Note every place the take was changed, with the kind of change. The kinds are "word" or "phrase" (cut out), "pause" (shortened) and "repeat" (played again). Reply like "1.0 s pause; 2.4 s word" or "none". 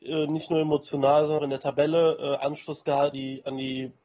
1.4 s word; 3.1 s word